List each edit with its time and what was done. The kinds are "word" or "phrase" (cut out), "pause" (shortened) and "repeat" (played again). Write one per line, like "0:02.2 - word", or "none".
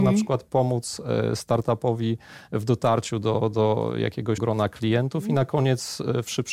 0:04.4 - word